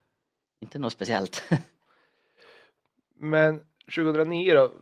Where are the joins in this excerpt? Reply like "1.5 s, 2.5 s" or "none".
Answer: none